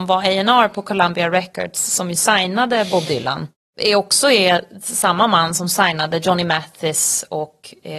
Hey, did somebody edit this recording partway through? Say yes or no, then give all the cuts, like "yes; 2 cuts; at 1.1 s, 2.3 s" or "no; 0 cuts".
no; 0 cuts